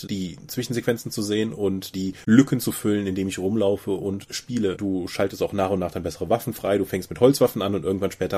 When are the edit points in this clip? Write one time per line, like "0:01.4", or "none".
0:01.9

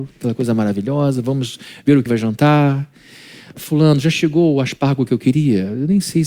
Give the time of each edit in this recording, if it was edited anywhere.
0:02.1

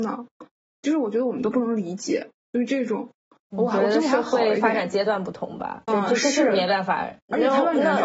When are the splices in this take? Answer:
0:02.4
0:05.9

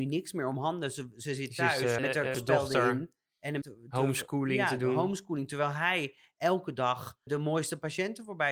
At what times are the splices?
0:02.0
0:02.3
0:03.6
0:07.3

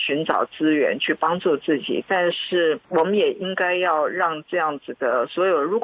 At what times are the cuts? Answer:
0:02.8

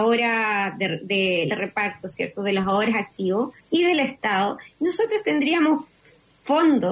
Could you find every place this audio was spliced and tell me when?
0:01.5
0:03.6

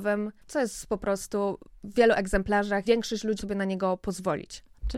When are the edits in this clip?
0:01.9
0:02.8
0:03.4

